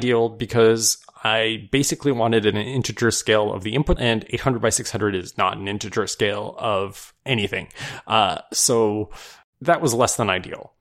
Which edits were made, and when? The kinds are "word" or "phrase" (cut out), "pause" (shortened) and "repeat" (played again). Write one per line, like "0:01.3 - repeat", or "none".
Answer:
0:04.0 - word
0:09.5 - pause